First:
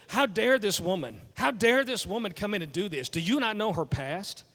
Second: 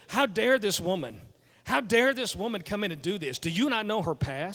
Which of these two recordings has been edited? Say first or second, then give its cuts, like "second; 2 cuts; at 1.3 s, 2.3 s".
first; 1 cut; at 1.3 s